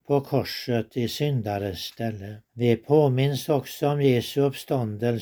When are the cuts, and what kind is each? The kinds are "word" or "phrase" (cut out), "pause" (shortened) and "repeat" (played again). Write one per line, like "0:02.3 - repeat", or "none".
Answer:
0:02.5 - pause